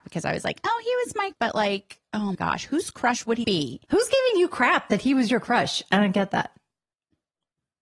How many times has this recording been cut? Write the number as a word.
four